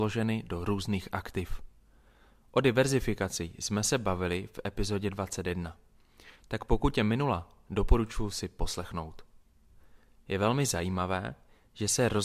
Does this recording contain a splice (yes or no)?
no